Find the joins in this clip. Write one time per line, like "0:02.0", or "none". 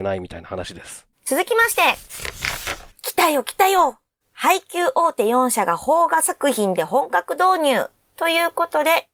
0:01.1
0:02.9
0:04.2